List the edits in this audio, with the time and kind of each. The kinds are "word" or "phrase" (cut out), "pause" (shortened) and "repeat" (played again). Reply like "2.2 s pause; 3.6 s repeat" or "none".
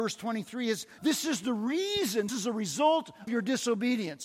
1.0 s word; 2.3 s word; 3.3 s word